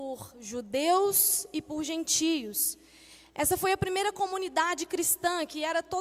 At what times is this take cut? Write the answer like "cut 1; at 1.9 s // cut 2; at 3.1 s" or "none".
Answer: none

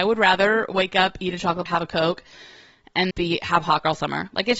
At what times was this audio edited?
cut 1; at 1.7 s // cut 2; at 3.1 s

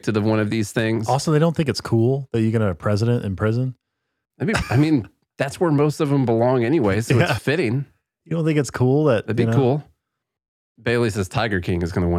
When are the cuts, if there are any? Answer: cut 1; at 4.6 s // cut 2; at 7.4 s

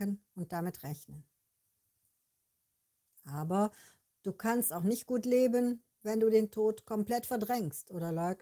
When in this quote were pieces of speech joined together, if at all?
none

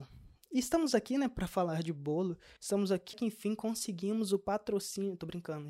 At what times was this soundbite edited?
cut 1; at 2.6 s // cut 2; at 3.1 s

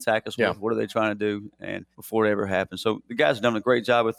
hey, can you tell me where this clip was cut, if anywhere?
cut 1; at 1.9 s

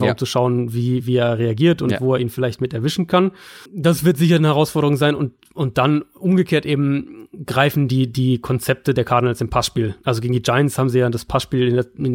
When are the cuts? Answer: cut 1; at 3.7 s

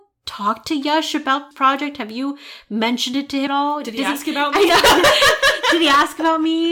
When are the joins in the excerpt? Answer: cut 1; at 1.5 s // cut 2; at 3.5 s

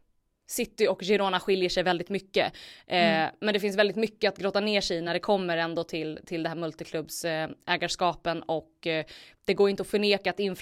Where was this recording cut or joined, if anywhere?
none

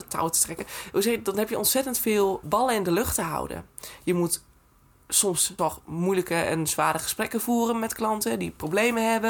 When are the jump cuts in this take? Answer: cut 1; at 2.4 s // cut 2; at 5.6 s

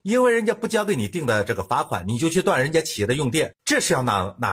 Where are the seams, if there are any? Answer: cut 1; at 3.6 s

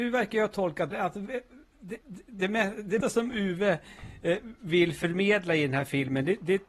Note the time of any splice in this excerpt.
cut 1; at 0.9 s // cut 2; at 2.0 s // cut 3; at 3.0 s

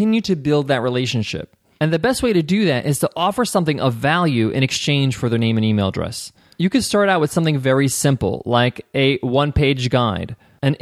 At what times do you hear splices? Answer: none

